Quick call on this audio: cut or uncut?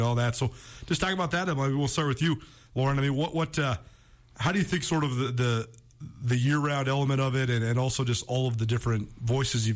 uncut